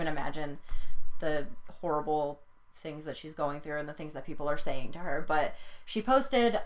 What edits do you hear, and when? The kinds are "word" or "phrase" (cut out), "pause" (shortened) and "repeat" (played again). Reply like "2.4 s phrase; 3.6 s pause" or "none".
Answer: none

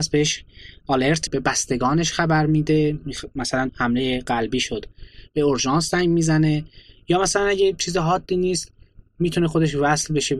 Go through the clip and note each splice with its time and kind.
1.3 s word; 3.7 s word

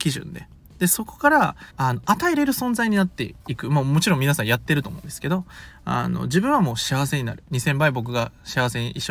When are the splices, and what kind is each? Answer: 1.7 s pause

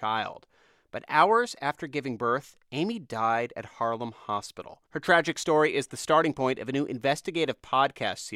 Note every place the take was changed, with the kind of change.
4.9 s pause

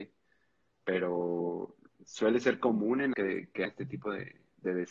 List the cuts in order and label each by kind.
1.9 s pause; 3.1 s word; 3.7 s word

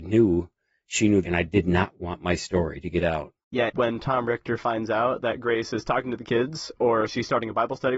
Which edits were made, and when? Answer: 1.2 s word; 3.7 s phrase

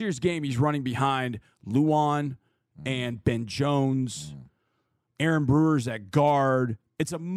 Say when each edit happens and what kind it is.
none

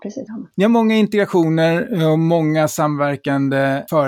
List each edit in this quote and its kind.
none

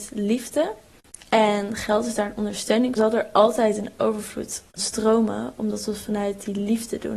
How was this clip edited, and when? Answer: 3.0 s phrase; 4.8 s word

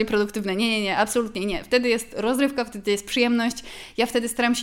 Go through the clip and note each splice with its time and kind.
none

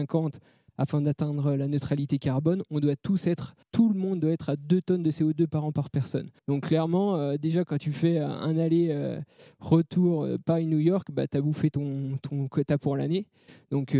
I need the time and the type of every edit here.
3.6 s pause; 6.4 s pause

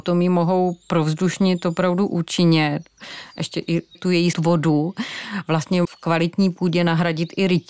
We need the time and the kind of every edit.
3.9 s phrase; 4.3 s phrase; 5.8 s word

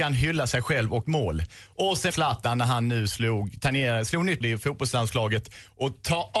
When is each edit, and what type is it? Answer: 1.0 s word; 2.1 s phrase; 4.4 s word

